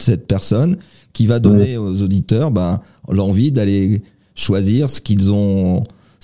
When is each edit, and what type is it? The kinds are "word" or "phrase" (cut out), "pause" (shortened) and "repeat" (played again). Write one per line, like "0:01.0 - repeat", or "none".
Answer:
none